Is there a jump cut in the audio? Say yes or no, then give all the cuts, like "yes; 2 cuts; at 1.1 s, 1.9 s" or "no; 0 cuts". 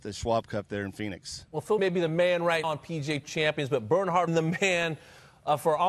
yes; 5 cuts; at 1.5 s, 1.8 s, 2.6 s, 3.2 s, 4.3 s